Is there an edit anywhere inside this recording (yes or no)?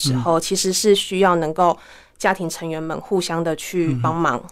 no